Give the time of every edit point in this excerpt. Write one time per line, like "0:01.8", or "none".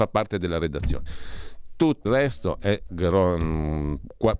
0:02.1